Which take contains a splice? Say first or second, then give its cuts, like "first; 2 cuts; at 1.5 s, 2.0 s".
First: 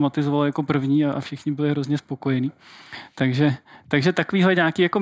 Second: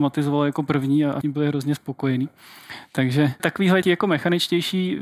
second; 3 cuts; at 1.2 s, 3.4 s, 3.8 s